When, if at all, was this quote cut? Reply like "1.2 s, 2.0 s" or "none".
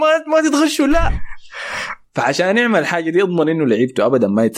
2.0 s